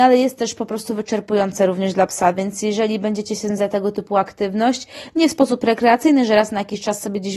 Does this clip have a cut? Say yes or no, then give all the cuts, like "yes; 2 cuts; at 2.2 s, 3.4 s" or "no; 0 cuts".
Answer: yes; 1 cut; at 3.6 s